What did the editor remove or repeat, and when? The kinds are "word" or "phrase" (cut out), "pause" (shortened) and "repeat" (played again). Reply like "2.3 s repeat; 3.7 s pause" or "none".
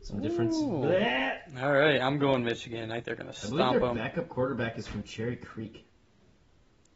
3.0 s word